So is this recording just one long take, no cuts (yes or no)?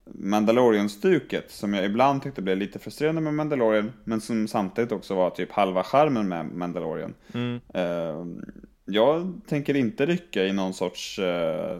no